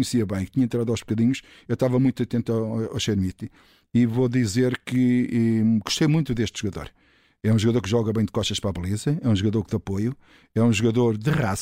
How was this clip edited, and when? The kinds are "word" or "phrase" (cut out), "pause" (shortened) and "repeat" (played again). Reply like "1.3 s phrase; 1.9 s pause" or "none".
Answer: none